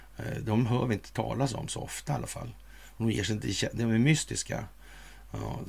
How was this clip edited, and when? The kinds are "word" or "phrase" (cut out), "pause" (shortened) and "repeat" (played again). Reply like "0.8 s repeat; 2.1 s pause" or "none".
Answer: none